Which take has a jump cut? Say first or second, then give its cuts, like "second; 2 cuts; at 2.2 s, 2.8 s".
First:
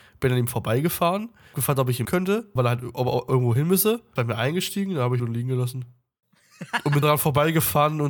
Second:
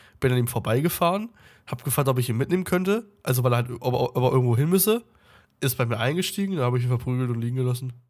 first; 7 cuts; at 1.5 s, 2.0 s, 2.6 s, 3.3 s, 4.2 s, 5.2 s, 7.0 s